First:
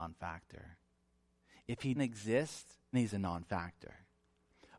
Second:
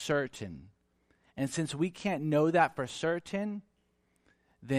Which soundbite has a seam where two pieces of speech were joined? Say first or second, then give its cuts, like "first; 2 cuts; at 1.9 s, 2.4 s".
first; 2 cuts; at 1.9 s, 2.9 s